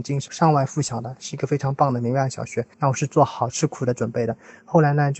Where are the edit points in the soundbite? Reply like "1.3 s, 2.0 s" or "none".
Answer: 2.7 s